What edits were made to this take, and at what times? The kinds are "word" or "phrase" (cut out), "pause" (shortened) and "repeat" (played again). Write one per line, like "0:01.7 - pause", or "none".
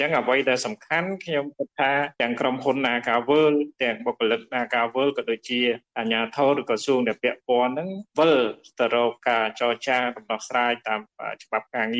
none